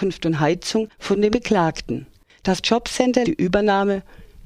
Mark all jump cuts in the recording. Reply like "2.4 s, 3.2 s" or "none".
1.3 s, 2.6 s, 3.2 s

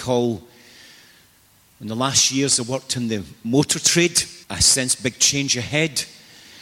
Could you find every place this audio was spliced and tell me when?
4.4 s

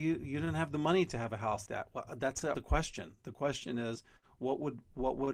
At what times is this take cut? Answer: 1.7 s, 2.5 s

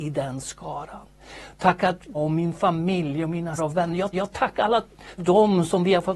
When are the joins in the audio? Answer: 2.1 s, 3.6 s, 4.1 s, 5.2 s

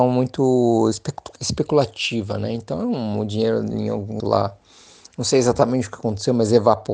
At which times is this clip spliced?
4.2 s

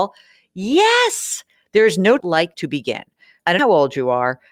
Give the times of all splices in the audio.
2.2 s, 2.5 s, 3.6 s

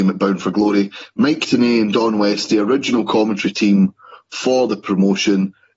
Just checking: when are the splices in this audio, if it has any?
none

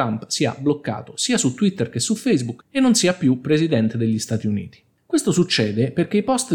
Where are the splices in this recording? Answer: none

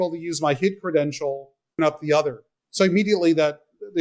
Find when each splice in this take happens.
1.8 s

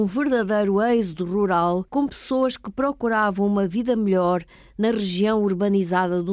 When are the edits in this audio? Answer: 1.9 s

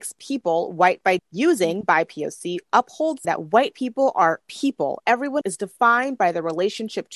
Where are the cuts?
1.2 s, 3.2 s, 5.0 s, 5.4 s

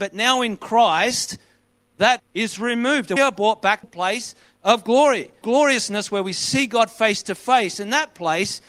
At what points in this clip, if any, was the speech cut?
2.2 s, 3.2 s, 3.8 s, 5.4 s

